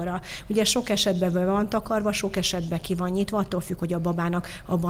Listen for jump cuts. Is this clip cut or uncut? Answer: uncut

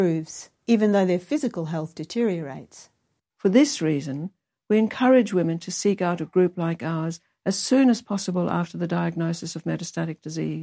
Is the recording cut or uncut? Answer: uncut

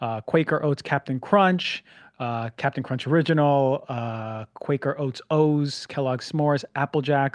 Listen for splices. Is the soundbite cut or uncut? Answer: uncut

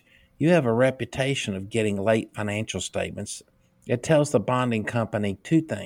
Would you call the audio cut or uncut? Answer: uncut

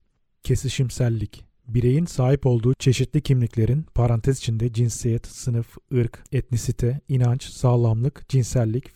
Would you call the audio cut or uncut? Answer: uncut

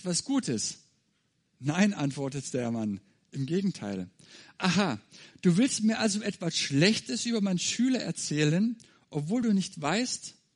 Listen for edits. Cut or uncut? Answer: uncut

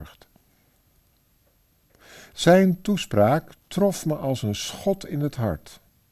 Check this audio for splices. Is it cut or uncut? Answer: uncut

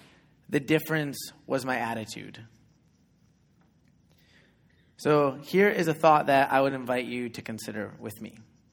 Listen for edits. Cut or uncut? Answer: uncut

